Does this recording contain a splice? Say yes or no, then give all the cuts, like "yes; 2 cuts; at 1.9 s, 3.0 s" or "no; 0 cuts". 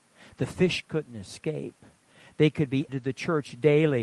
yes; 1 cut; at 2.9 s